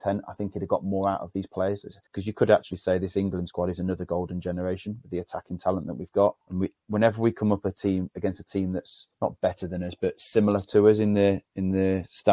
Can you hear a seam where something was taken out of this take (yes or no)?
yes